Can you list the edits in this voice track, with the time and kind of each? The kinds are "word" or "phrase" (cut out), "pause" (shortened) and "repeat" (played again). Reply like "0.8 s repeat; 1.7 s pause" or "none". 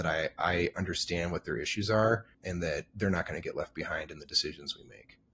2.3 s pause